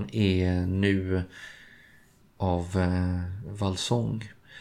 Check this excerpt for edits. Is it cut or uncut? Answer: cut